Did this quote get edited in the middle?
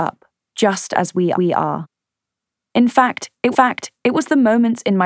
yes; 2 cuts; at 1.3 s, 3.5 s

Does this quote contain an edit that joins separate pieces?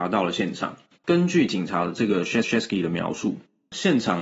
yes; 1 cut; at 2.4 s

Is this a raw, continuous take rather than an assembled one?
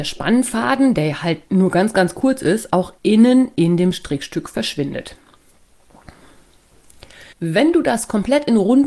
no; 3 cuts; at 1.5 s, 3.0 s, 7.3 s

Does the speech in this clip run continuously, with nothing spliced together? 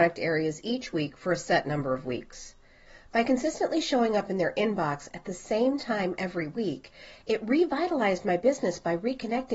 yes; 0 cuts

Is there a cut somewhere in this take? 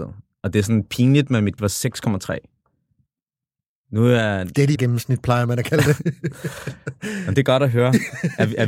yes; 2 cuts; at 1.6 s, 4.7 s

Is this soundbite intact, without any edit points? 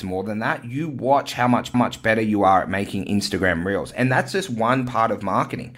no; 1 cut; at 1.7 s

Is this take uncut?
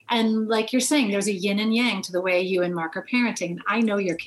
yes; 0 cuts

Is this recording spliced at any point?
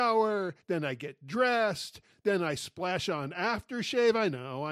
no; 0 cuts

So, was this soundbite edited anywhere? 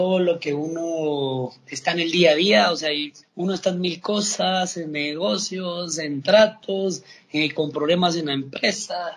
yes; 1 cut; at 3.2 s

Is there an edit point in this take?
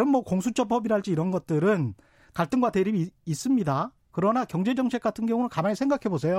no; 0 cuts

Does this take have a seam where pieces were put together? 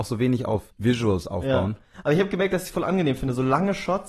no; 0 cuts

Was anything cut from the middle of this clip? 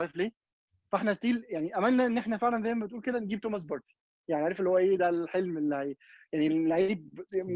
no; 0 cuts

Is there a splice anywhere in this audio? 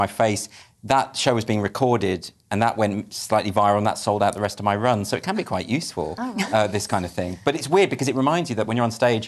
no; 0 cuts

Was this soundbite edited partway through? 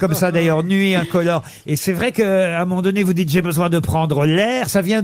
no; 0 cuts

